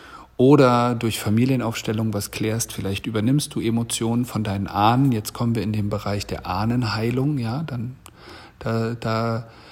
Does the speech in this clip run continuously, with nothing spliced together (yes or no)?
yes